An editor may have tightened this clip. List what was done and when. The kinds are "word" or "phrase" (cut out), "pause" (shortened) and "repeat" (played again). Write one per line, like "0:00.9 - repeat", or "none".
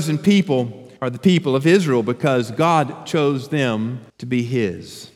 0:01.0 - pause
0:04.1 - pause